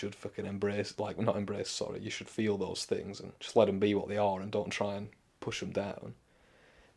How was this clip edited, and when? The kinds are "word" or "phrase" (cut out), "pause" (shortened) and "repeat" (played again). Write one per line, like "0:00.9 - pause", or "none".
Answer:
0:03.4 - pause